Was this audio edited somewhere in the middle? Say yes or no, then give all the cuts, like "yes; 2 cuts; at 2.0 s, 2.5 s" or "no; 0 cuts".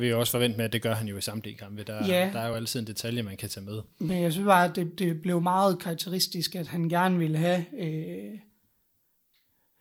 no; 0 cuts